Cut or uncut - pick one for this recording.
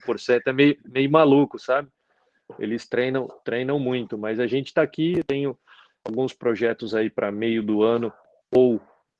uncut